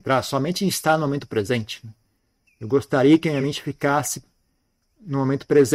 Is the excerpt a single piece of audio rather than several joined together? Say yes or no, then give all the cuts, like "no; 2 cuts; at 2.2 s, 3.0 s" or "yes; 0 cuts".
yes; 0 cuts